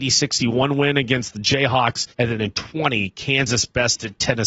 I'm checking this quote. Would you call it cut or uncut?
cut